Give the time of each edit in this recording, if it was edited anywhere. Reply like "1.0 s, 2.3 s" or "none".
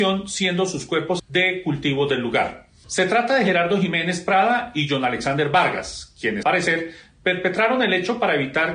1.2 s, 6.4 s